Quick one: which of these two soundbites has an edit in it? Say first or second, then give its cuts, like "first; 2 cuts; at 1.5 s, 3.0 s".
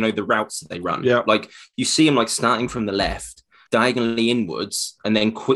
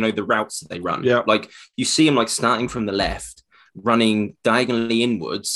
first; 1 cut; at 3.7 s